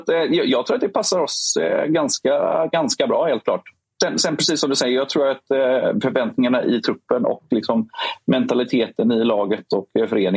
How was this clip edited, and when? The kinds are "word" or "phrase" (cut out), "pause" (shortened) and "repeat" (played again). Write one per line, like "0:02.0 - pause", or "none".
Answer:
none